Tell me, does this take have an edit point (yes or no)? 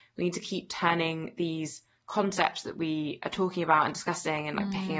no